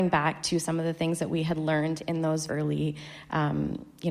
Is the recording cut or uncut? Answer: cut